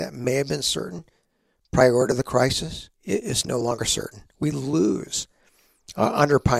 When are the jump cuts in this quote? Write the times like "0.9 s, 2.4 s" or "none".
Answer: 2.9 s